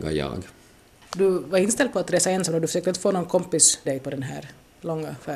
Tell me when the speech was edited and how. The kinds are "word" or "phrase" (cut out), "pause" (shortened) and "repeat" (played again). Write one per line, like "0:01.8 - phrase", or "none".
0:03.9 - word